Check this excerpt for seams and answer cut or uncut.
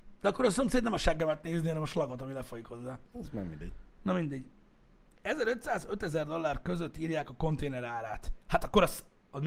cut